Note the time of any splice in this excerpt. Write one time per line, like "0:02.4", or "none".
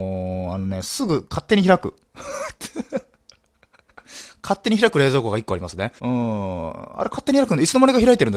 0:06.0